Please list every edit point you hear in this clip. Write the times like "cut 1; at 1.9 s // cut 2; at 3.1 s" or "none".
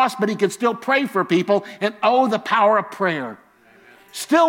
none